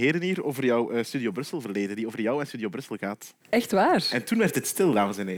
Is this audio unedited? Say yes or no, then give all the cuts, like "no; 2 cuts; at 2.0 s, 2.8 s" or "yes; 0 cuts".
no; 1 cut; at 3.4 s